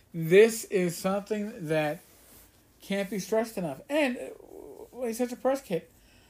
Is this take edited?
no; 0 cuts

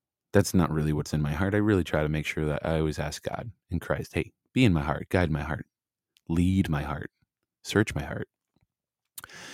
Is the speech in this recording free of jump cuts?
yes; 0 cuts

